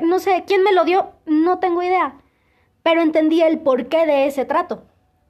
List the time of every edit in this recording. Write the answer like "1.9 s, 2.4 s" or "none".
none